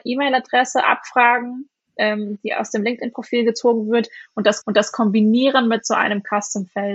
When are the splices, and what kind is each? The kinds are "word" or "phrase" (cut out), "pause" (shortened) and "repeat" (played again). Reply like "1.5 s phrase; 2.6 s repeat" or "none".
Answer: 4.6 s repeat